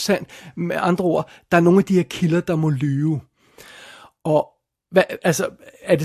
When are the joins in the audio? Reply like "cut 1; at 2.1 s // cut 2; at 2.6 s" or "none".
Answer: none